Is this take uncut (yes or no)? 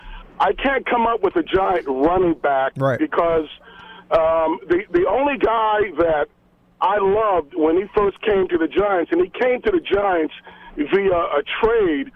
yes